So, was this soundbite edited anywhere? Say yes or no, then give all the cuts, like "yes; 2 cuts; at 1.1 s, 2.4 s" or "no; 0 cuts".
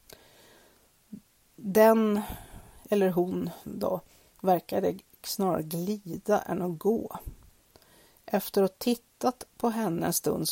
no; 0 cuts